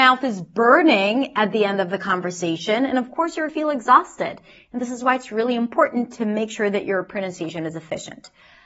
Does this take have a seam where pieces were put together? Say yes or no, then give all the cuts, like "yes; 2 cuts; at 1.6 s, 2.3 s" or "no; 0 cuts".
yes; 1 cut; at 3.5 s